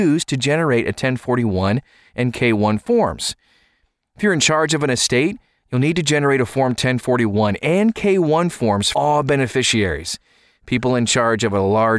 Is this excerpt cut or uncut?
cut